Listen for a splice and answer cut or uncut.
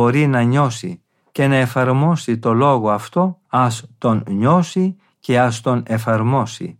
cut